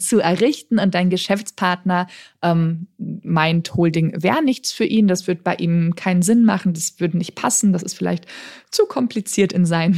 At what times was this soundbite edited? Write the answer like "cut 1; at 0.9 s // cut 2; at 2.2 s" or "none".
none